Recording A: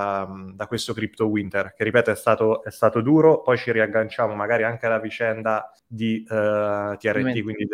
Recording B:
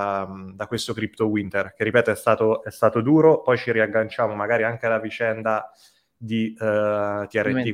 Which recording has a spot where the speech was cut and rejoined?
A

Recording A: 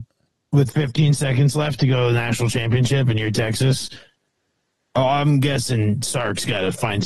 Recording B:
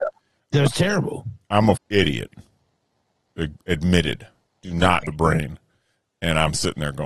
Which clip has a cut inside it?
B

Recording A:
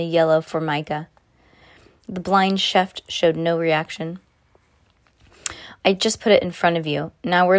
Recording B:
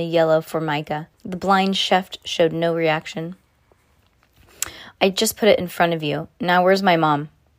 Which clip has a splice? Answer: B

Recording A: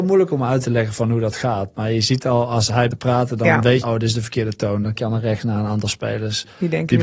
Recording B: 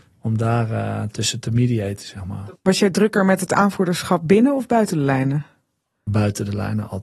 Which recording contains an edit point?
A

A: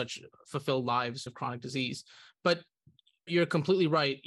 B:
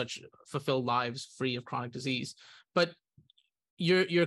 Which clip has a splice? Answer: A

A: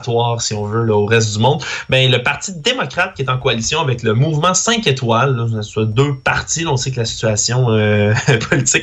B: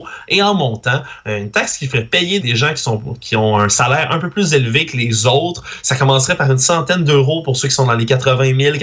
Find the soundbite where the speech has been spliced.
B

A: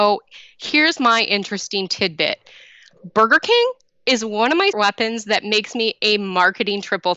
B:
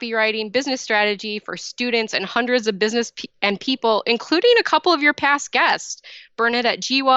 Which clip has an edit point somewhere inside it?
A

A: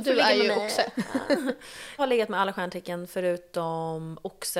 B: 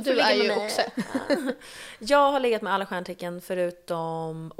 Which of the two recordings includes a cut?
A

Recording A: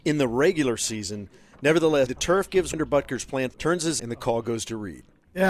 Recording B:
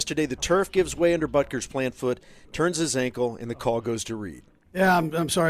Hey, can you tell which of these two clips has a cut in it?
A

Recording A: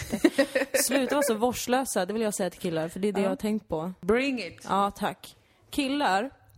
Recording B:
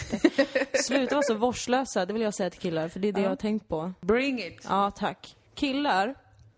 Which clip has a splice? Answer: B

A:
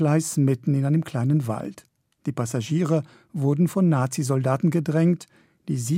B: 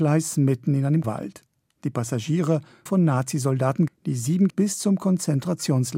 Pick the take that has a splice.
B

